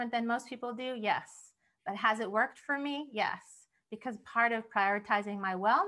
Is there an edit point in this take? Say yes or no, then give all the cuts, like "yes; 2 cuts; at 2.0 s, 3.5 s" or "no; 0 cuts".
no; 0 cuts